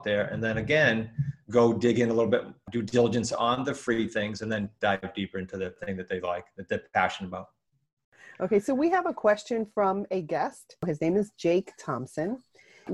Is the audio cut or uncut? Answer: uncut